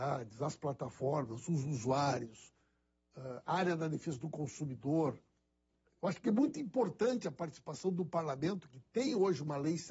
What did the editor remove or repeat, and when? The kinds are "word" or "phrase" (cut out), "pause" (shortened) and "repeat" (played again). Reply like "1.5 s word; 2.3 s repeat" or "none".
none